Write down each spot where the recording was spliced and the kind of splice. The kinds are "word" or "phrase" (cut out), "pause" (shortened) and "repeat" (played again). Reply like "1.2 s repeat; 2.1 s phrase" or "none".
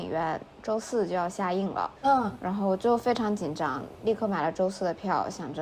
2.0 s pause